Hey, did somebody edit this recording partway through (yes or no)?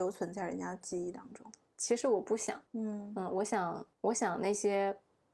yes